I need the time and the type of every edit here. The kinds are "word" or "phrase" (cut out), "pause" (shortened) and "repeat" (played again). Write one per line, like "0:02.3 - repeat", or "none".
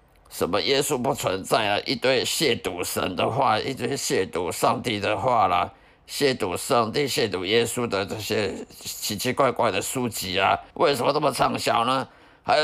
0:10.7 - pause

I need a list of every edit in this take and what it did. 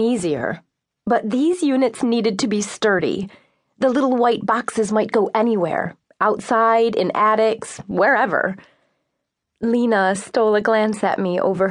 none

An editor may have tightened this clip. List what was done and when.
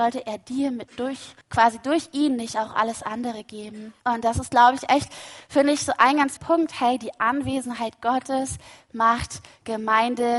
0:01.4 - pause
0:04.0 - pause
0:06.4 - word

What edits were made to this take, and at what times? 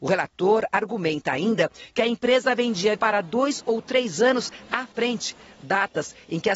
0:03.0 - word

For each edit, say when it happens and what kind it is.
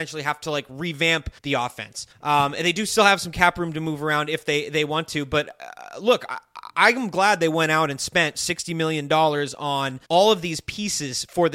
0:01.4 - pause
0:02.1 - pause
0:10.0 - pause

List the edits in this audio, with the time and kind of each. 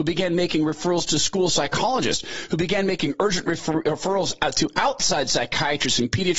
none

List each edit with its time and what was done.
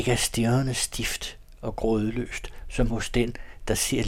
none

